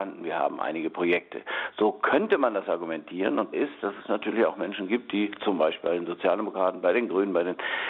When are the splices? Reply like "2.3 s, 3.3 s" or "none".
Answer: 3.5 s